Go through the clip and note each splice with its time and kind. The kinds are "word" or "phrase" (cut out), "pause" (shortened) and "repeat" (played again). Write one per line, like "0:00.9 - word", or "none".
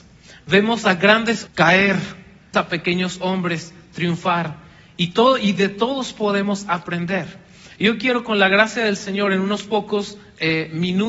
0:01.5 - word
0:02.5 - word

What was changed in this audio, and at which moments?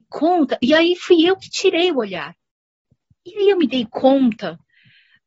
none

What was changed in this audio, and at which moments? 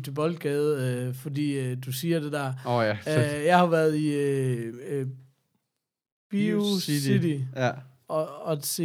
none

